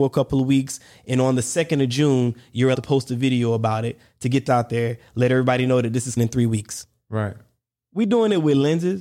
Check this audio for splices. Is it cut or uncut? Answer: cut